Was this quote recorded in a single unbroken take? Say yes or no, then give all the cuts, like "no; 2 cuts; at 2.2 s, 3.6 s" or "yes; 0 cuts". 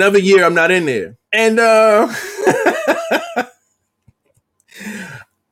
no; 1 cut; at 1.3 s